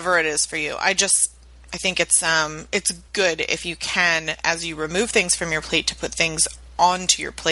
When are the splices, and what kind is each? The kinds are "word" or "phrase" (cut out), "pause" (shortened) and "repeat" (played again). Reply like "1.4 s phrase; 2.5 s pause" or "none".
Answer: 3.1 s pause